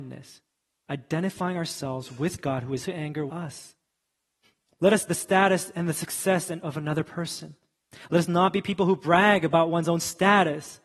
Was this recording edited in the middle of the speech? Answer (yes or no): yes